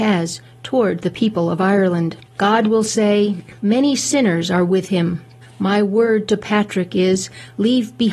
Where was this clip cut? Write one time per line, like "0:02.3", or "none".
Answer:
0:02.2
0:03.6
0:05.4